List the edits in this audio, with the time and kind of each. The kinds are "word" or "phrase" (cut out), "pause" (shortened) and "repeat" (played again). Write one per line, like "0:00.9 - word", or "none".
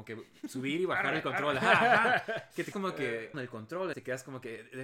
0:02.7 - word
0:03.3 - phrase
0:03.9 - word